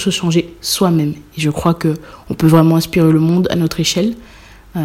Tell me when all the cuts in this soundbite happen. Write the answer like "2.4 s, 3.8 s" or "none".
none